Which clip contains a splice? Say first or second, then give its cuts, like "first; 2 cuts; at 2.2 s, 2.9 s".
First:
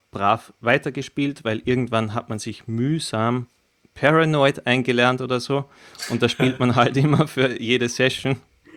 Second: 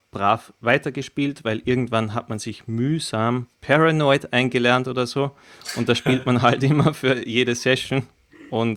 second; 1 cut; at 3.5 s